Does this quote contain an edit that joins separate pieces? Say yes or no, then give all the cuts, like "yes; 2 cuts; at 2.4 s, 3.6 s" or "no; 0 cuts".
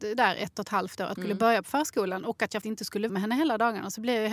yes; 3 cuts; at 1.2 s, 2.6 s, 3.1 s